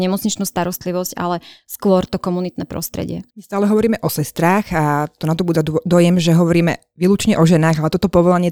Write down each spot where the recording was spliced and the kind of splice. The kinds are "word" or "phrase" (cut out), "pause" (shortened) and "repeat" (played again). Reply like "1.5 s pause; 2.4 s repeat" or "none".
3.3 s pause